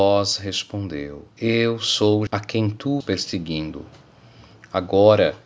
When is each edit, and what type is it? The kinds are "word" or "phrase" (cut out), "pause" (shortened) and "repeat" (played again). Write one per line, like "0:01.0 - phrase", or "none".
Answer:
0:01.3 - pause
0:02.3 - word
0:03.0 - word

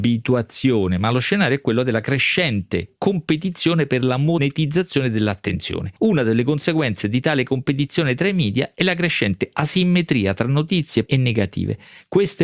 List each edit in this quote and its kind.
0:06.0 - pause
0:11.1 - word

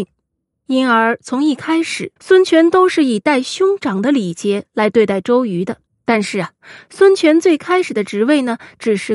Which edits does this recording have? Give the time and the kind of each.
0:02.2 - pause
0:05.9 - pause

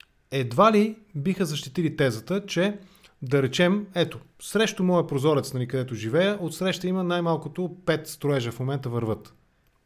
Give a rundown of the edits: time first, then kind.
none

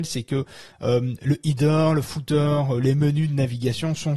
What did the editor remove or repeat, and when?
none

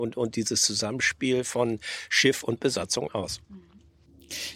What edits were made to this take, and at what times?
0:03.4 - pause

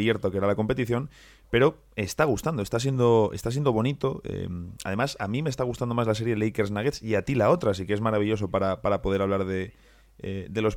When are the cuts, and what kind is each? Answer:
none

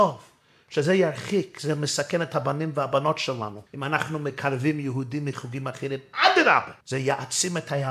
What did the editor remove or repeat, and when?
0:03.7 - pause
0:06.8 - pause

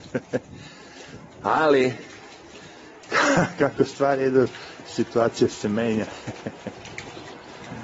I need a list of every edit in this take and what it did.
0:01.3 - pause

